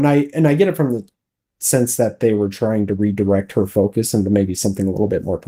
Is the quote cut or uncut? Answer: uncut